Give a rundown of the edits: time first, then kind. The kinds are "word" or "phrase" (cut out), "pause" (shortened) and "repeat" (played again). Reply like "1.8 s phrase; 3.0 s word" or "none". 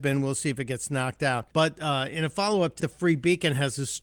1.5 s pause; 2.8 s word